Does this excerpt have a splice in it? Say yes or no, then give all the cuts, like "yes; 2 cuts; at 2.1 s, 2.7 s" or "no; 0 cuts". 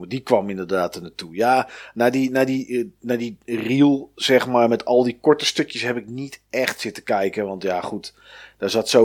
no; 0 cuts